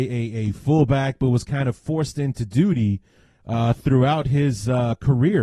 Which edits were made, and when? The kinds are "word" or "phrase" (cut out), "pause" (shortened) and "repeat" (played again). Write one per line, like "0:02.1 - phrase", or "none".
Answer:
none